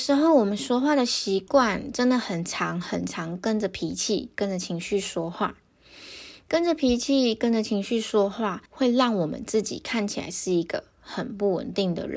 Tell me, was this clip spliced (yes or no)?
yes